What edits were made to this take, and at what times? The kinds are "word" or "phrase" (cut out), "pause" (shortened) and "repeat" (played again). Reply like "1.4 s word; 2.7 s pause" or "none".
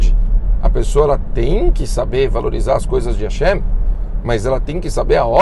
none